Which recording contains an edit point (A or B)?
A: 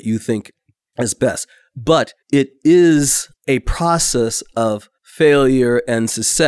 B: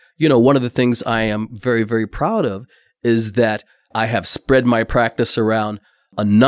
A